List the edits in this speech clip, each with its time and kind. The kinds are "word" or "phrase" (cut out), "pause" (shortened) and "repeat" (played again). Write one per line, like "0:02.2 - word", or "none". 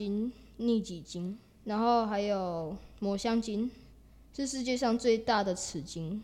none